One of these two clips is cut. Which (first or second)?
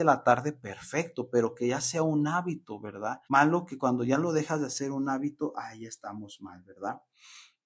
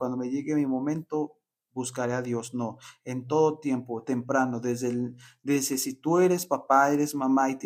first